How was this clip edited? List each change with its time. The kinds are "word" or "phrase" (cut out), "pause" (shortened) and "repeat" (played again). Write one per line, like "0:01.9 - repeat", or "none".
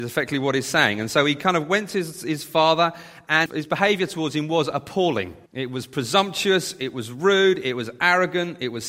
0:03.5 - word
0:05.5 - pause